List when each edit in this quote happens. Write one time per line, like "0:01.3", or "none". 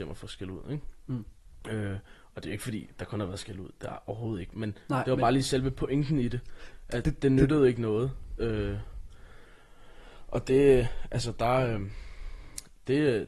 none